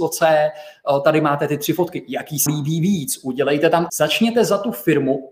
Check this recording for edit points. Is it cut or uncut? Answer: cut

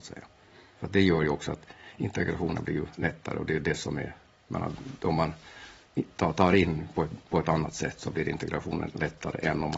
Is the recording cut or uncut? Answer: uncut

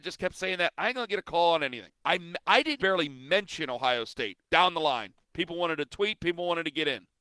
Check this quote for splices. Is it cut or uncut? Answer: cut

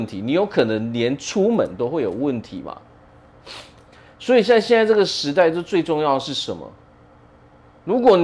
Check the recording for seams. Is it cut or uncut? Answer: uncut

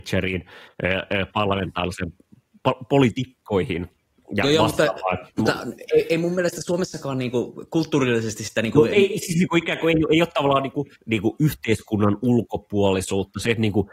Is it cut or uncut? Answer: cut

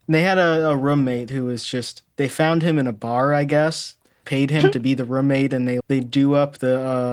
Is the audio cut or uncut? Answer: cut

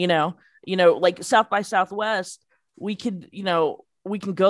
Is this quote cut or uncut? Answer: uncut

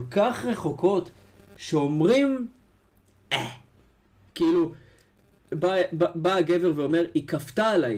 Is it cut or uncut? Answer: uncut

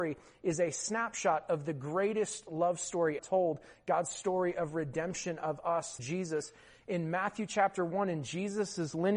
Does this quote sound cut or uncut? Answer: cut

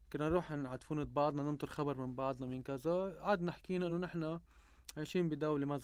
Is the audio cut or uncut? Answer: uncut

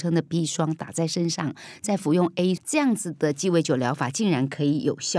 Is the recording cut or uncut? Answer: cut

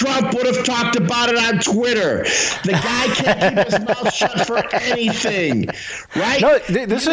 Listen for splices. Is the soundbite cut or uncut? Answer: uncut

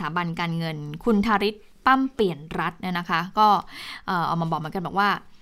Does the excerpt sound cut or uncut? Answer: uncut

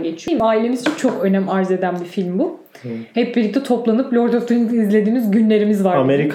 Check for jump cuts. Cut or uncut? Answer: uncut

